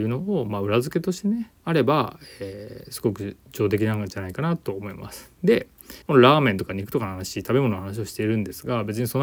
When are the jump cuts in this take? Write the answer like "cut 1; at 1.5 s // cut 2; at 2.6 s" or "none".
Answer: cut 1; at 1.6 s // cut 2; at 6.0 s